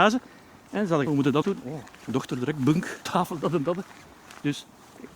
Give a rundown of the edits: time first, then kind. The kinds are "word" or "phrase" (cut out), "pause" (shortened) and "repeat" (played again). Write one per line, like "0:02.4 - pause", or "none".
0:01.1 - phrase
0:01.4 - phrase
0:01.9 - pause
0:03.0 - phrase